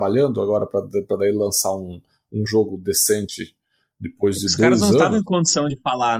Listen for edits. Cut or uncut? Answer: uncut